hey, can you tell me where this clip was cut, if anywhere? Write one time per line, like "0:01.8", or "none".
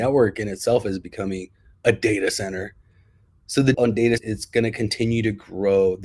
0:03.7
0:04.2